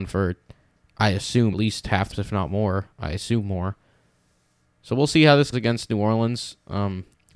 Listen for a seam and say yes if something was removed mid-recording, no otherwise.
yes